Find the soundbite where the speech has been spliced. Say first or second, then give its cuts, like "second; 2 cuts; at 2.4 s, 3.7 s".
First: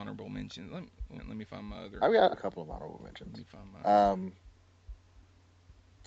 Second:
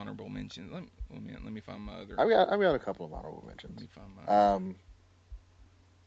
first; 2 cuts; at 1.2 s, 2.3 s